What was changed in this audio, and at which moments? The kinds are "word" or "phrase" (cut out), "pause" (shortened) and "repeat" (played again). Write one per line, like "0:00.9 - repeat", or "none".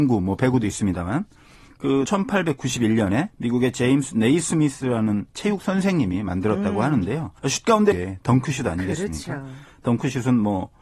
0:02.1 - word
0:03.3 - pause
0:05.3 - pause
0:07.4 - pause
0:07.9 - phrase